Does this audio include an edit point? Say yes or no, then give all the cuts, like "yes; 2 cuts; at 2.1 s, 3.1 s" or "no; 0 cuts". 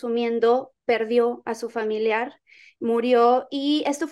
no; 0 cuts